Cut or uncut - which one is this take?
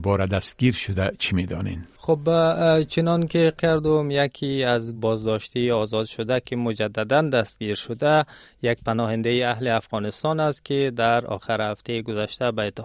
cut